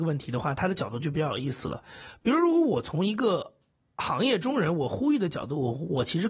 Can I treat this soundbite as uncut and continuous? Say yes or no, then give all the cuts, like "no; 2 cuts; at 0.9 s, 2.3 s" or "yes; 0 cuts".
yes; 0 cuts